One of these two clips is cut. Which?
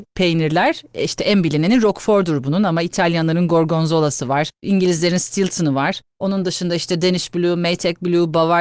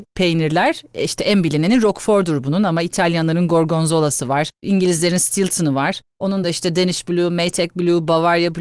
second; 1 cut; at 6.4 s

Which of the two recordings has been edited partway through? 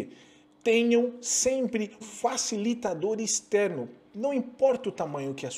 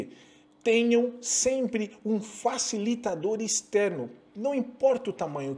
first; 1 cut; at 2.0 s

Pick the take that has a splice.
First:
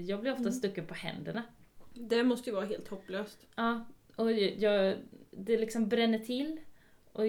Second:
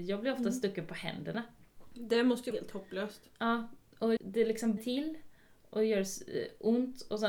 second; 3 cuts; at 2.5 s, 4.2 s, 4.8 s

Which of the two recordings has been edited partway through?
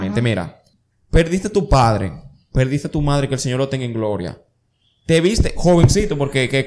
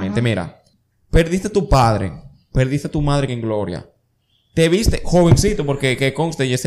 second; 1 cut; at 3.3 s

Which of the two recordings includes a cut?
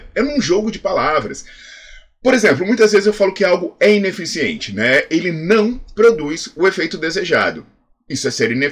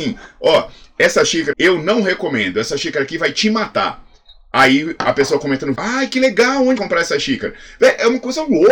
second; 3 cuts; at 1.5 s, 5.7 s, 6.8 s

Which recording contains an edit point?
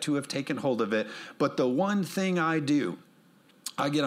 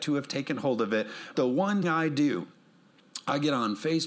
second; 2 cuts; at 1.3 s, 1.8 s

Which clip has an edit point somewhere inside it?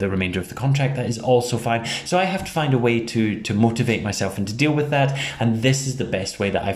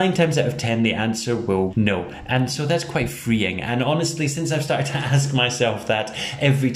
second; 1 cut; at 1.7 s

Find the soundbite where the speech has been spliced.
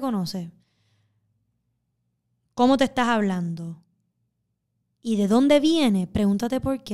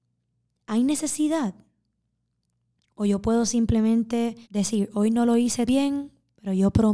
second; 2 cuts; at 4.4 s, 5.7 s

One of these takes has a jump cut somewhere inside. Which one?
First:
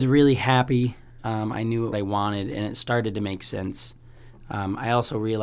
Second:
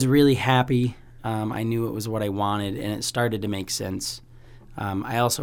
first; 1 cut; at 1.9 s

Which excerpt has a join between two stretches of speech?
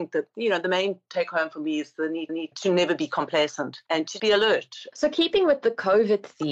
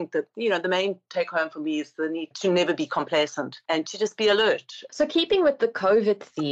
first; 2 cuts; at 2.3 s, 4.2 s

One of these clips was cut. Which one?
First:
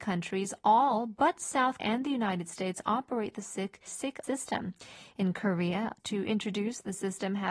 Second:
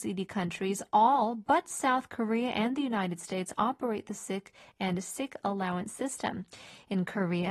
first; 4 cuts; at 1.8 s, 3.9 s, 4.2 s, 6.0 s

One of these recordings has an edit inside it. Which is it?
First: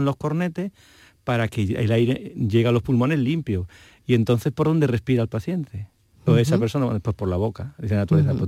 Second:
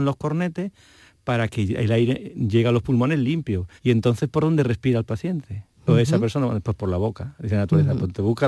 second; 2 cuts; at 3.8 s, 5.7 s

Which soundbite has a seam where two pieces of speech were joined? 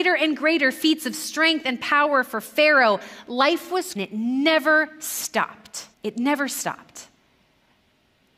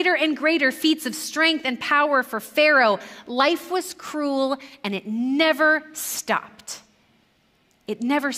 first; 2 cuts; at 4.0 s, 5.9 s

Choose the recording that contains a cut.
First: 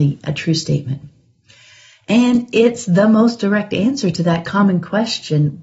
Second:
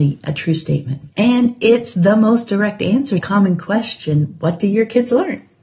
second; 2 cuts; at 1.1 s, 3.2 s

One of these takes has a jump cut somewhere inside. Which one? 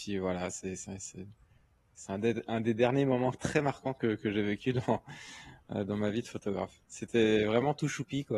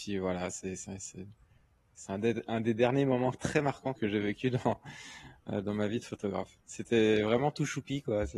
second; 1 cut; at 3.9 s

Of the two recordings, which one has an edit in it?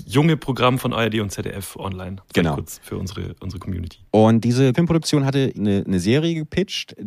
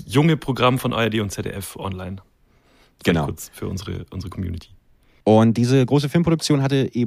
first; 4 cuts; at 2.2 s, 4.1 s, 4.7 s, 5.5 s

